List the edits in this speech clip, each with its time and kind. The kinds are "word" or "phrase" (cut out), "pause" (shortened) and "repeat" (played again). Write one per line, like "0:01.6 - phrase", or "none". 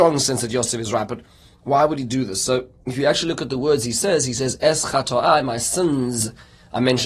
none